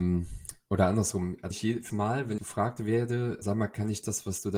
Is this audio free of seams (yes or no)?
no